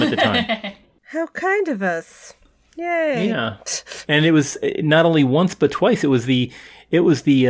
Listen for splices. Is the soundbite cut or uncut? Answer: uncut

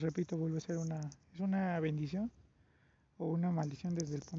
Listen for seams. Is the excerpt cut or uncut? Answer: uncut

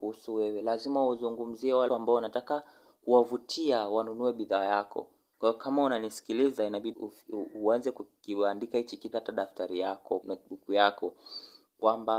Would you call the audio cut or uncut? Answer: cut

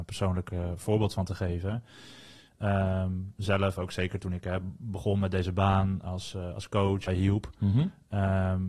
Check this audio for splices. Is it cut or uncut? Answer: cut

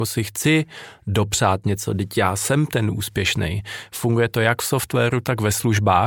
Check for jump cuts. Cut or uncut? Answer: uncut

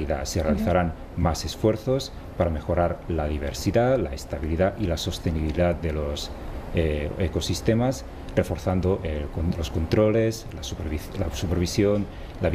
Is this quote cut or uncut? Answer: uncut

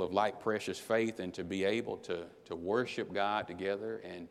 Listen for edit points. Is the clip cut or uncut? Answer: uncut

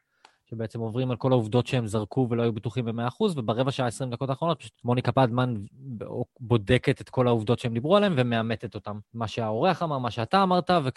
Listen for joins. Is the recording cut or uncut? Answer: cut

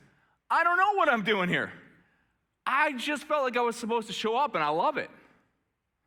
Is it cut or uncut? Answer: uncut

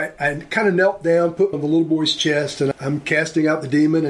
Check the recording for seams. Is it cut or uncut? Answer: cut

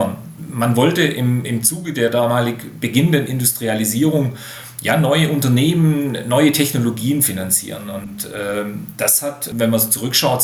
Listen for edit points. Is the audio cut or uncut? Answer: uncut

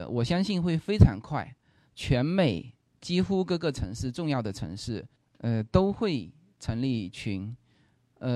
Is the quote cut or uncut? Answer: uncut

